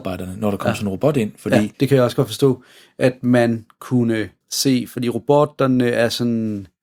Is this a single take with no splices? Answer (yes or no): no